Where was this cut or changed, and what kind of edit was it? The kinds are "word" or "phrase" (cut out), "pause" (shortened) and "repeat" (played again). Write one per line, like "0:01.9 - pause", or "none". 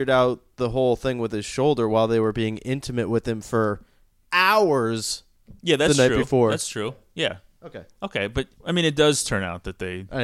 0:05.6 - pause
0:08.5 - pause